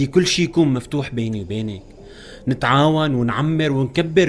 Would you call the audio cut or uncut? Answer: uncut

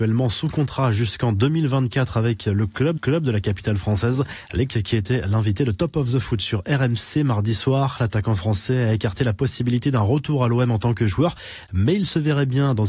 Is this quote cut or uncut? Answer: cut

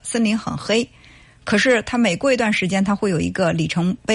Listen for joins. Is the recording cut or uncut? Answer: uncut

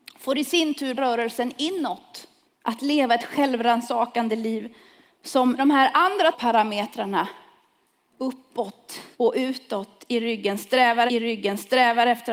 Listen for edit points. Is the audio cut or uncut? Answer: cut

